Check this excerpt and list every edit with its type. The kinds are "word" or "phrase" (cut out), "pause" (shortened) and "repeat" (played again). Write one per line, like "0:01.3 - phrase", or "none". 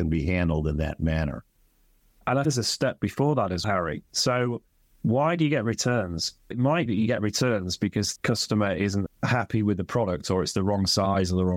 0:02.4 - word
0:03.6 - word
0:06.5 - word
0:06.9 - word
0:08.2 - word
0:09.1 - word